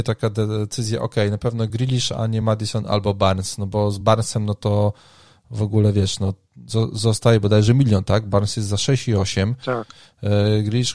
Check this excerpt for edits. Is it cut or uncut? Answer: uncut